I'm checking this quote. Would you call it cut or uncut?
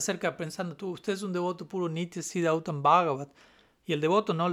uncut